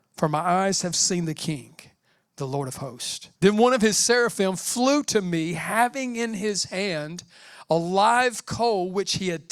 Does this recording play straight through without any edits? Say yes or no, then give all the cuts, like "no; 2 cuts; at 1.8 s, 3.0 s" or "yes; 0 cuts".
no; 1 cut; at 3.4 s